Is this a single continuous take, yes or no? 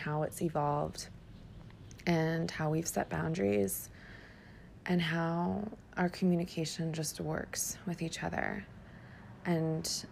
yes